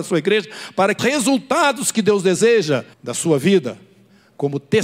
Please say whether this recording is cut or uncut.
cut